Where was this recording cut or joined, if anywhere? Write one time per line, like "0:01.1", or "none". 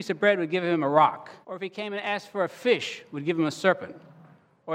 0:01.4

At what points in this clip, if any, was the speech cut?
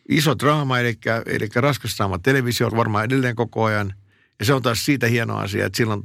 0:02.7

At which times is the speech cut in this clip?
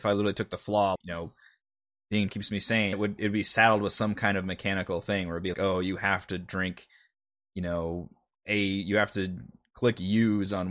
0:01.0
0:02.3
0:02.9
0:05.5

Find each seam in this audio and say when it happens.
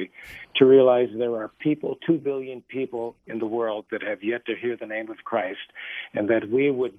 none

